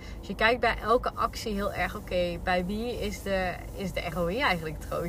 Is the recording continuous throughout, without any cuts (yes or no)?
yes